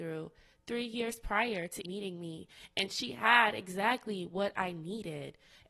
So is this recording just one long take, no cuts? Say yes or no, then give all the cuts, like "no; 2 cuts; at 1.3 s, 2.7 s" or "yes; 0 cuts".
no; 1 cut; at 1.8 s